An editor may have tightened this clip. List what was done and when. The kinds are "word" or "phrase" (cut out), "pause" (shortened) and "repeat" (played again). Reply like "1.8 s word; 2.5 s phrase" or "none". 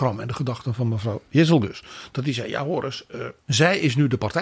3.4 s pause